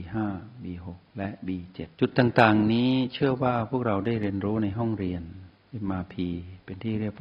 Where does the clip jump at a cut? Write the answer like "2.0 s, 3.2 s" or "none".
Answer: 1.1 s, 1.9 s